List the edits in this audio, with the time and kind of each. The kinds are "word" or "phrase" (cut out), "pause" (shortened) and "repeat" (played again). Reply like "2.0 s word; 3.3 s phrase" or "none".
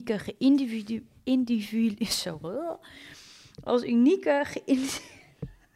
none